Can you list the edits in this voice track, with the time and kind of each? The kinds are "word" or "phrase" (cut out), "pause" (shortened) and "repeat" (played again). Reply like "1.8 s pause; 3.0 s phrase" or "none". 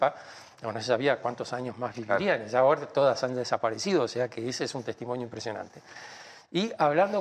none